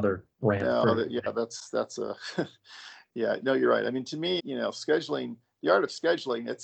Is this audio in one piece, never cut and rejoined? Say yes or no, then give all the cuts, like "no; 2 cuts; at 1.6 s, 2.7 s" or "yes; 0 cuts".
no; 1 cut; at 4.4 s